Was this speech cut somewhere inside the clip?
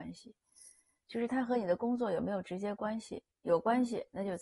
no; 0 cuts

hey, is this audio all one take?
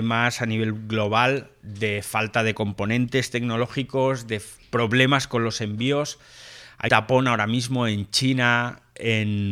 no; 1 cut; at 6.9 s

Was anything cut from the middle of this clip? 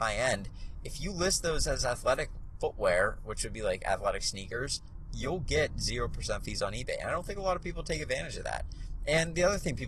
no; 0 cuts

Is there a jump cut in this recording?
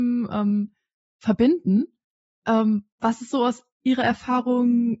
no; 0 cuts

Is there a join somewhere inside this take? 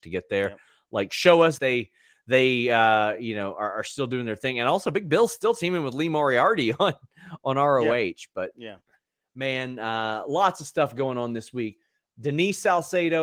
yes; 1 cut; at 1.6 s

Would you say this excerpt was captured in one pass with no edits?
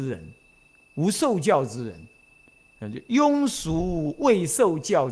yes; 0 cuts

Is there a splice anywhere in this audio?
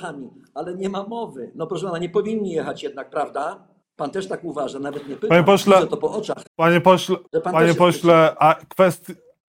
yes; 3 cuts; at 3.8 s, 6.5 s, 7.3 s

